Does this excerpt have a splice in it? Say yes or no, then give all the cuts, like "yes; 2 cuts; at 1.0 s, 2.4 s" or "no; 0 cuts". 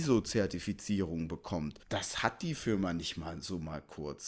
yes; 1 cut; at 1.8 s